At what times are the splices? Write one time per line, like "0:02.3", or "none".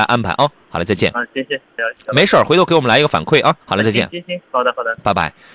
0:01.8
0:03.6